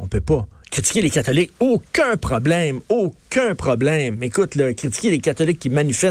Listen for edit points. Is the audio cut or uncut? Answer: uncut